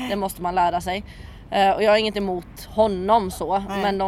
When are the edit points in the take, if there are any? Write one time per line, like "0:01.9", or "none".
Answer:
none